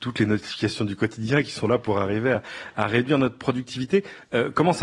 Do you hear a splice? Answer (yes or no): no